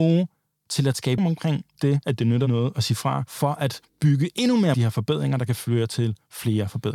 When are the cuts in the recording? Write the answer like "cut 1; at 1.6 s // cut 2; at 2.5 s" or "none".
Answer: cut 1; at 1.2 s // cut 2; at 3.9 s // cut 3; at 4.7 s